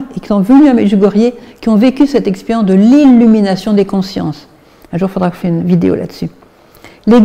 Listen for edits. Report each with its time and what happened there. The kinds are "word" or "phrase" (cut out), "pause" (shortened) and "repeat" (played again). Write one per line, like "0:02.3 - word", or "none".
0:05.4 - word